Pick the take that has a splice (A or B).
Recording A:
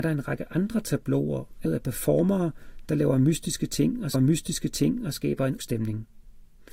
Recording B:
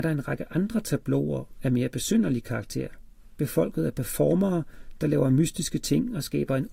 A